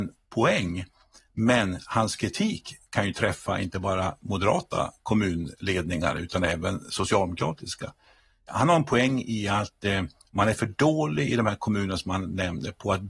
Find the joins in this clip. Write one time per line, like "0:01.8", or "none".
none